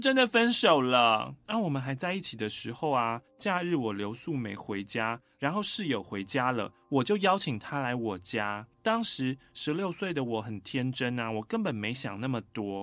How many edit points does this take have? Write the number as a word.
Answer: two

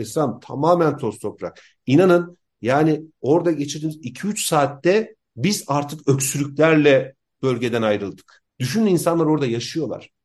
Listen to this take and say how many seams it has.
one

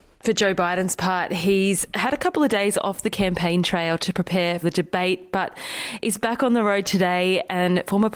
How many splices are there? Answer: one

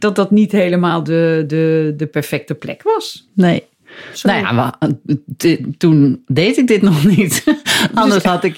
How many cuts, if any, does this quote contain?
zero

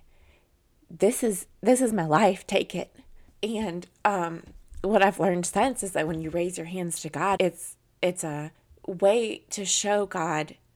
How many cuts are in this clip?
three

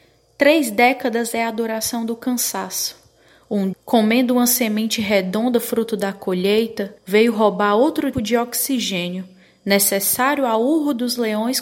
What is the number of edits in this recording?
three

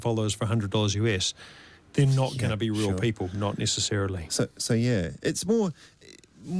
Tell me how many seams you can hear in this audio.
zero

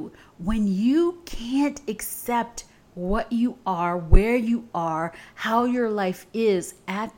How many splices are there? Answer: zero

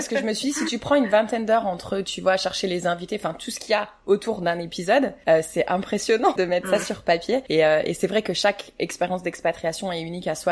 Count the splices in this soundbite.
one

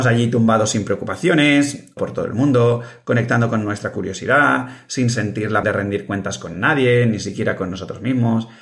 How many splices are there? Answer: two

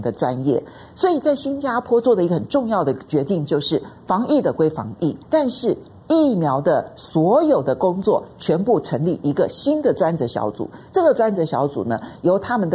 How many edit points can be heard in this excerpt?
one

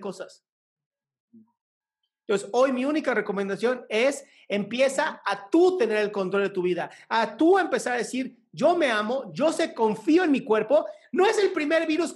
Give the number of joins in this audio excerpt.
zero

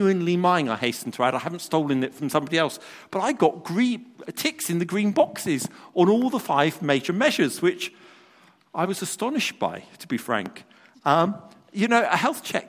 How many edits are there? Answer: zero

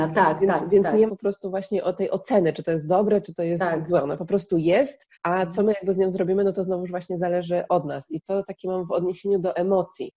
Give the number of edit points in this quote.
three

